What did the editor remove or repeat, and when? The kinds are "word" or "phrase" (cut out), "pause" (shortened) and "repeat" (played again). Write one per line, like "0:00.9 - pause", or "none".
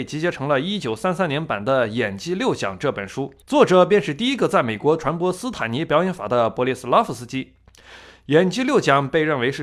0:03.4 - pause

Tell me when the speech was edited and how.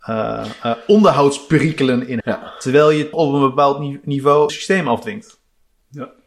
0:02.2 - word
0:03.1 - word
0:04.5 - word

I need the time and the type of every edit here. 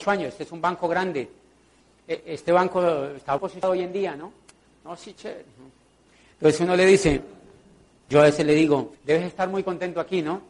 0:03.4 - word
0:08.9 - pause

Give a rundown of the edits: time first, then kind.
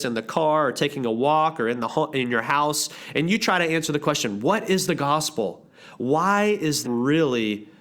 0:06.8 - word

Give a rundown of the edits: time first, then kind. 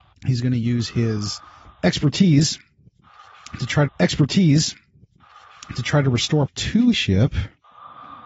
0:03.9 - repeat
0:06.5 - word
0:06.9 - word

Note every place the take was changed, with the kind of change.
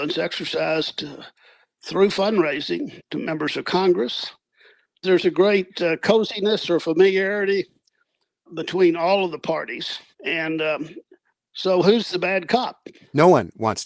none

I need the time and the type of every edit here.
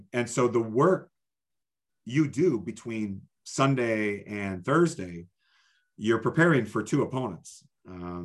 none

